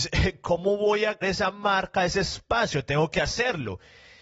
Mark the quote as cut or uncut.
cut